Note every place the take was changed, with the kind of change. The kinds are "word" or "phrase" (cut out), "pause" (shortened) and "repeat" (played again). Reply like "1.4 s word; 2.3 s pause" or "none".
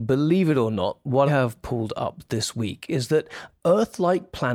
1.3 s word